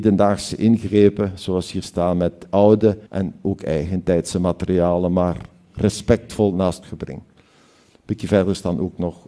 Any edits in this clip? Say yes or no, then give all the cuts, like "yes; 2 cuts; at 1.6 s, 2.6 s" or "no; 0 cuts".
yes; 2 cuts; at 3.1 s, 6.8 s